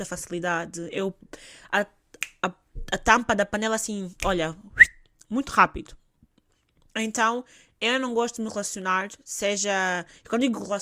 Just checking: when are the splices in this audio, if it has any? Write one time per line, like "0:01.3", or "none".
none